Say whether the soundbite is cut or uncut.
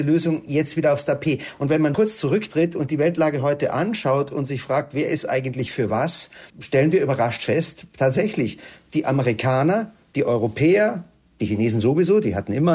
cut